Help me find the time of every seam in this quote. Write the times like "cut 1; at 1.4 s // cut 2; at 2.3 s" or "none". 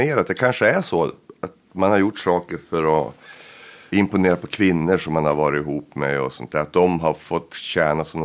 cut 1; at 3.9 s